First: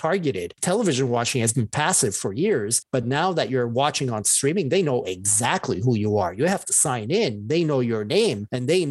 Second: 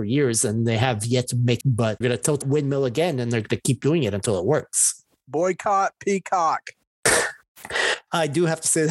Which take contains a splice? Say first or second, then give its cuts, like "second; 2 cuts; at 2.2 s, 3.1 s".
second; 3 cuts; at 1.6 s, 2.0 s, 2.4 s